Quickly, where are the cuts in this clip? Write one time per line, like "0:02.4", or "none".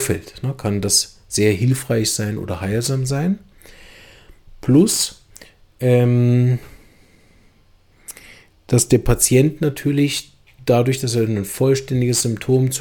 none